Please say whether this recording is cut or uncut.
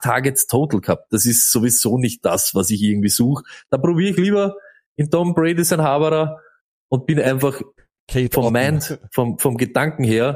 uncut